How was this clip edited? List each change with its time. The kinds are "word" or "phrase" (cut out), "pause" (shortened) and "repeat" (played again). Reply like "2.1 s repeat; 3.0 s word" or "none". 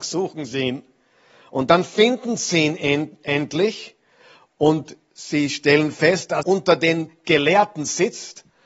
6.4 s word